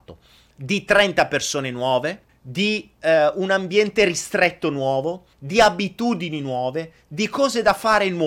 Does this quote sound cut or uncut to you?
cut